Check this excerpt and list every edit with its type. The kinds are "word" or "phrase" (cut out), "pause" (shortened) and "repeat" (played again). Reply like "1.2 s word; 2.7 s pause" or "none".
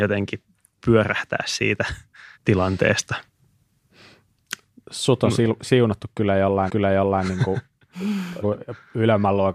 2.3 s pause; 6.7 s repeat; 8.4 s word